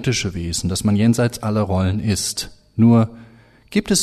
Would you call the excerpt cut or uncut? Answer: uncut